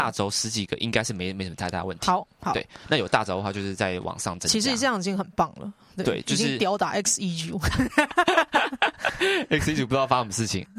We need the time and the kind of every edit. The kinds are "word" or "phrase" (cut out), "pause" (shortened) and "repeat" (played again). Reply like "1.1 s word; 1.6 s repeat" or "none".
none